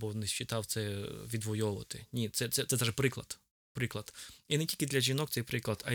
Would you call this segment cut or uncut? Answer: uncut